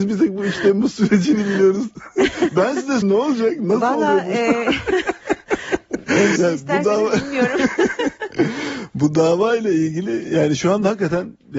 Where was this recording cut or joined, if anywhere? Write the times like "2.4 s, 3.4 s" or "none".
3.0 s, 6.4 s